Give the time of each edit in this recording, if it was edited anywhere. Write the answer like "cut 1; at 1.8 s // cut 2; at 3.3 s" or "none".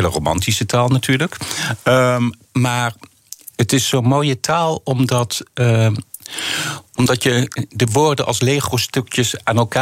none